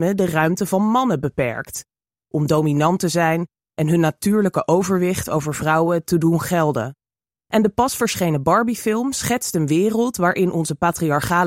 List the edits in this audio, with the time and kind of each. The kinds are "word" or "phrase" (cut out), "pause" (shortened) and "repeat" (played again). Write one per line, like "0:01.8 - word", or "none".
none